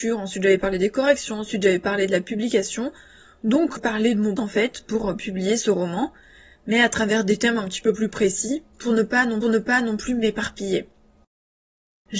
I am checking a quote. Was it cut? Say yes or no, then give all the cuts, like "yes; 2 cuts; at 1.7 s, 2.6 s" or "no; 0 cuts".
yes; 4 cuts; at 3.8 s, 4.4 s, 8.7 s, 9.4 s